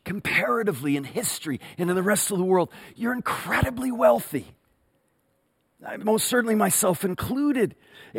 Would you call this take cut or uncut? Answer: uncut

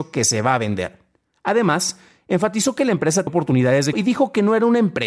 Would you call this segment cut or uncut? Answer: cut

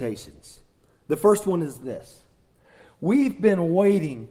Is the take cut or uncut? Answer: uncut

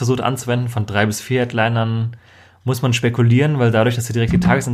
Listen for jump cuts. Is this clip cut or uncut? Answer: uncut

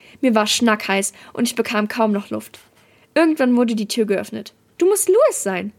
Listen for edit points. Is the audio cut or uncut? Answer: uncut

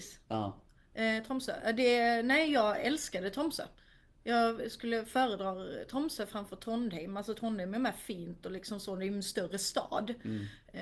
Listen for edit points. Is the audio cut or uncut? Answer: uncut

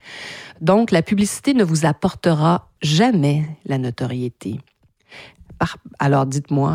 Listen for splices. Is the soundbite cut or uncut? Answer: cut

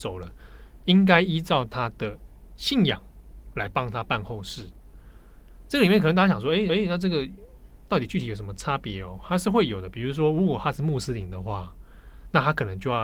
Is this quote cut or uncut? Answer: cut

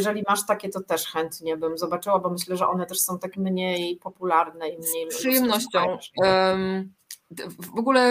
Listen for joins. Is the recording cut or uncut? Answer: uncut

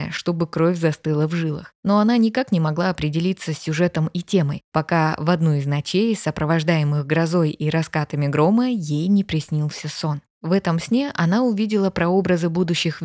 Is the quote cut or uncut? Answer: uncut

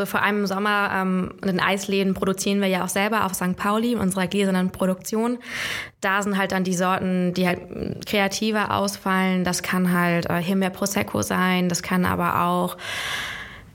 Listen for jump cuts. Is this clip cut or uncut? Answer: uncut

